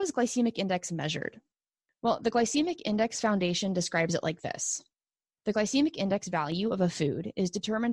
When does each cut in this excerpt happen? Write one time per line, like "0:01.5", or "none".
none